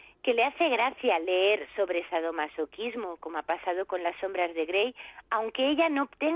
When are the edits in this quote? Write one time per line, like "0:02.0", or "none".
none